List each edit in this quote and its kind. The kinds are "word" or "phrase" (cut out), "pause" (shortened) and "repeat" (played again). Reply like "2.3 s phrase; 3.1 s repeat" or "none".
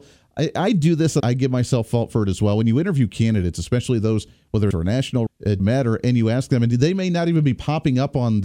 1.2 s word; 4.7 s phrase; 5.3 s word; 5.6 s word